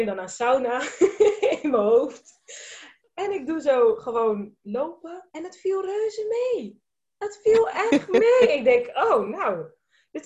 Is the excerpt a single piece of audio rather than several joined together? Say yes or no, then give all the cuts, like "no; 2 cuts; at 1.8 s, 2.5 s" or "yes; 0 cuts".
yes; 0 cuts